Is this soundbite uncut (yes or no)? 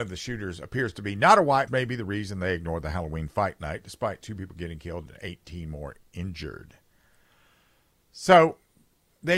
no